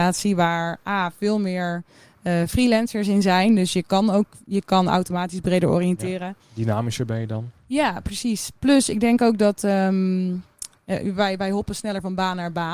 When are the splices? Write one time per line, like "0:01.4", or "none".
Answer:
none